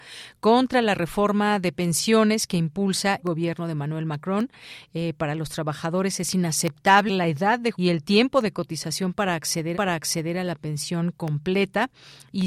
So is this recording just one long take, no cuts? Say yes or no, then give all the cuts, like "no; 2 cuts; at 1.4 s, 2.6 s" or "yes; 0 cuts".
no; 4 cuts; at 3.2 s, 7.1 s, 7.7 s, 9.7 s